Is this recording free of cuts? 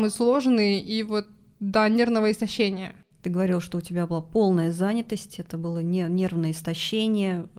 yes; 0 cuts

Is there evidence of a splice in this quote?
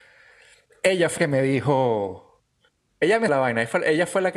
yes; 2 cuts; at 1.2 s, 3.3 s

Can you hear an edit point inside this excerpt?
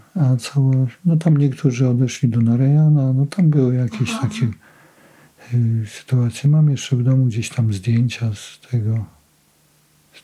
no; 0 cuts

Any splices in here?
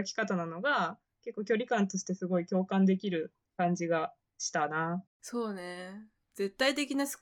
yes; 1 cut; at 5.1 s

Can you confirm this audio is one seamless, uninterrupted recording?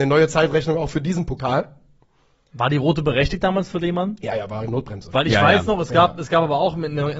yes; 0 cuts

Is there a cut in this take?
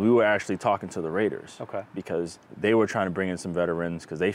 yes; 1 cut; at 2.4 s

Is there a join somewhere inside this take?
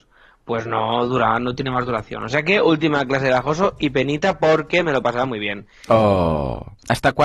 no; 0 cuts

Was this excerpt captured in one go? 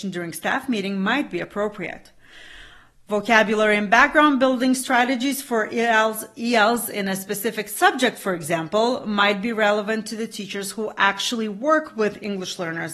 yes; 0 cuts

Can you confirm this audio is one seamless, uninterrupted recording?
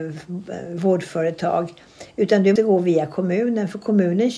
no; 1 cut; at 2.6 s

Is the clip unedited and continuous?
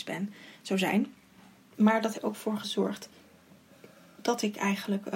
no; 1 cut; at 2.1 s

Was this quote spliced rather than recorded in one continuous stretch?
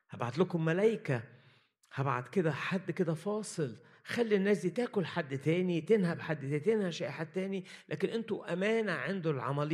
no; 0 cuts

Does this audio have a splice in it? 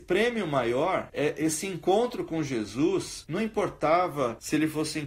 no; 0 cuts

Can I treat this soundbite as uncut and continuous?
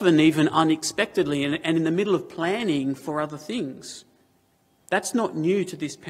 yes; 0 cuts

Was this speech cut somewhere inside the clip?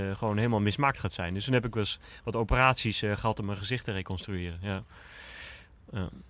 no; 0 cuts

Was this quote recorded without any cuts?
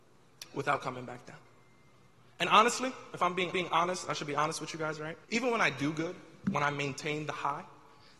no; 3 cuts; at 3.5 s, 5.2 s, 6.4 s

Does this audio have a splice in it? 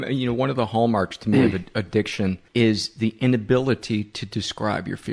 yes; 1 cut; at 2.5 s

